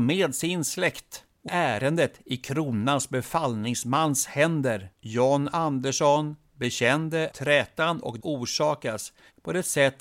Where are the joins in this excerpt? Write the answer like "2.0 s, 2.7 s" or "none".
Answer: 1.5 s, 4.9 s, 7.3 s, 8.2 s